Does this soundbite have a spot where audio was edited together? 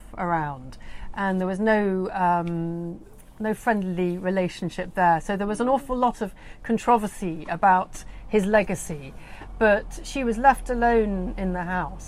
no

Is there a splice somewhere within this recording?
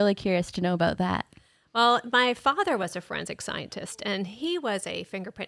no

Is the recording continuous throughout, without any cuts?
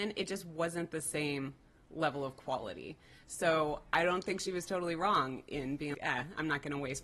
no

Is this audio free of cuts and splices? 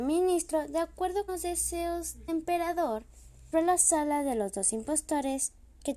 no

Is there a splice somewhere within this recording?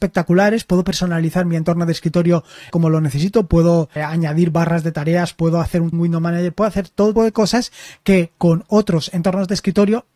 yes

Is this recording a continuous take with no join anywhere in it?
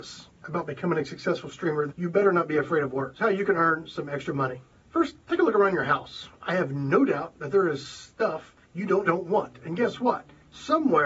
no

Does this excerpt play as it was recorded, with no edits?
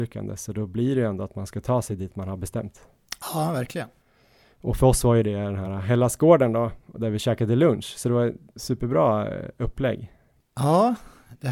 yes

